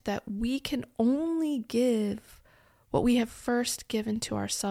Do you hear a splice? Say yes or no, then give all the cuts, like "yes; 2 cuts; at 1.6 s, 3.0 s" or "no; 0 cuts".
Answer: no; 0 cuts